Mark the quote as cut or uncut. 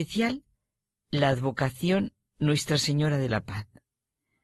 uncut